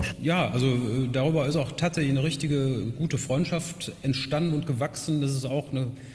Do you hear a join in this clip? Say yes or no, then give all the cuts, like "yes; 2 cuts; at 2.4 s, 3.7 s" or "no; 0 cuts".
no; 0 cuts